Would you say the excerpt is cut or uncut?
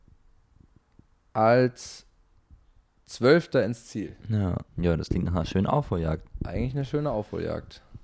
cut